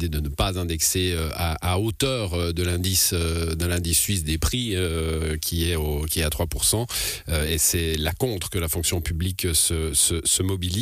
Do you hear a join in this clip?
no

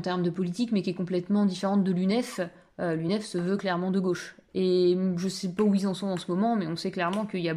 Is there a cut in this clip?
no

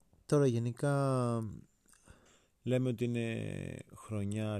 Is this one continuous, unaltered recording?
no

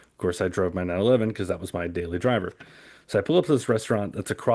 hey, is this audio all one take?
yes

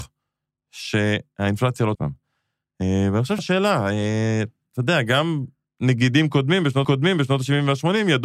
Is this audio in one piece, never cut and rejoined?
no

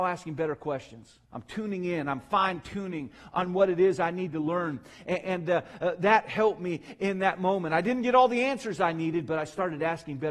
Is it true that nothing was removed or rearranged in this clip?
no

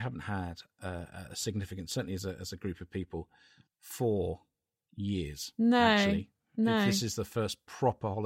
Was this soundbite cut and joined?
yes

